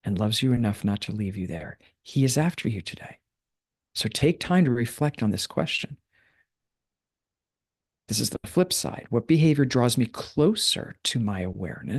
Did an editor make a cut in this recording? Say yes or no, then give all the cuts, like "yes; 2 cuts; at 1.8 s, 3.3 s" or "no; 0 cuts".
no; 0 cuts